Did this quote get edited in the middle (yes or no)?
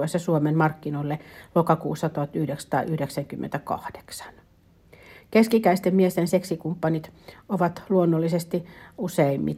no